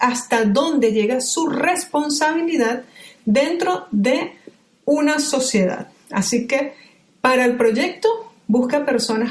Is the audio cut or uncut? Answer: uncut